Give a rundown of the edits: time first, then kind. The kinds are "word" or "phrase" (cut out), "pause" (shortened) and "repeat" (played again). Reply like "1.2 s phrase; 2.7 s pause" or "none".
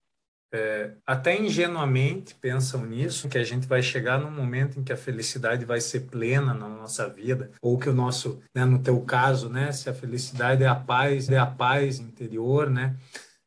1.0 s pause; 3.2 s word; 7.6 s pause; 8.5 s pause; 11.3 s repeat